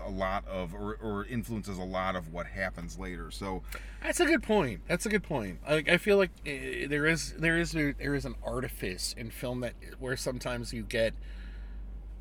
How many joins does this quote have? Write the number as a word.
zero